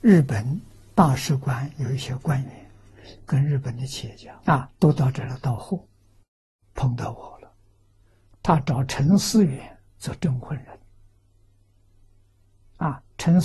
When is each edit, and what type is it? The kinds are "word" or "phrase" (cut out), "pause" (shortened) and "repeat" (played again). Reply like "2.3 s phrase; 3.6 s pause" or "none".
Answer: 4.4 s pause